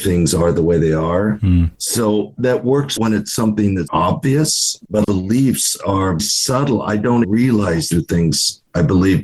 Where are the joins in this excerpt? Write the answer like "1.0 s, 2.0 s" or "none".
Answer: 3.0 s, 3.9 s, 5.0 s, 6.2 s, 7.2 s, 7.9 s